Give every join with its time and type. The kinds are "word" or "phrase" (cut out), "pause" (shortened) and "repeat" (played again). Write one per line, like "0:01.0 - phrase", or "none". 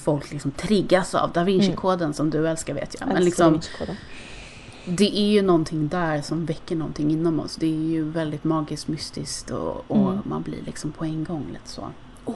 none